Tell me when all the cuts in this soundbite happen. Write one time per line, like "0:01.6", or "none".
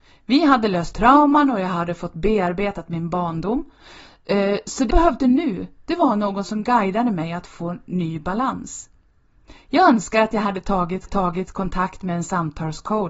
0:00.9
0:04.9
0:11.1